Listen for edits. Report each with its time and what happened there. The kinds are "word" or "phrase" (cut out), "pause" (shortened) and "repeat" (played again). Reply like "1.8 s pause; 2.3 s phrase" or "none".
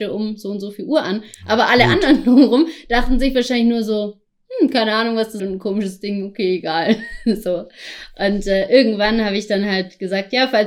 5.4 s phrase